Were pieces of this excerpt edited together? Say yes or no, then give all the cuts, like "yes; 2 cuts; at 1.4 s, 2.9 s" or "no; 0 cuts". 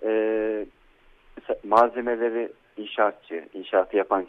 yes; 1 cut; at 1.6 s